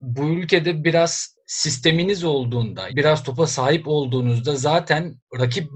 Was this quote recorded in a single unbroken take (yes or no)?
no